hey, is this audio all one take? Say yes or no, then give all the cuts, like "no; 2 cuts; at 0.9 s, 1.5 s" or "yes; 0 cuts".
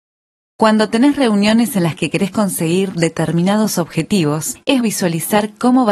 no; 1 cut; at 4.8 s